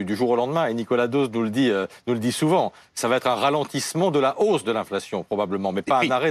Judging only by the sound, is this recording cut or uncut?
uncut